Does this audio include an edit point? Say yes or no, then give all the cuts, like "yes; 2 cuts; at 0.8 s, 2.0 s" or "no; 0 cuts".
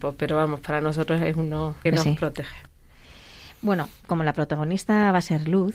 yes; 2 cuts; at 1.9 s, 4.0 s